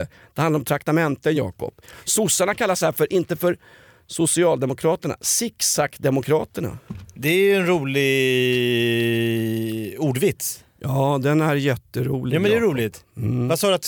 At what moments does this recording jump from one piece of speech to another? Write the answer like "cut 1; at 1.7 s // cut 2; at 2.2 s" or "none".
none